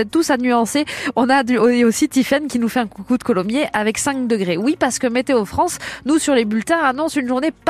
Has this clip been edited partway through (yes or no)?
no